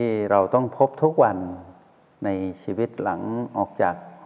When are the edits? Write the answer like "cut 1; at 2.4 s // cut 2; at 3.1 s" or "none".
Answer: none